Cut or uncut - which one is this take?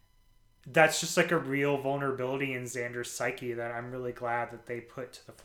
uncut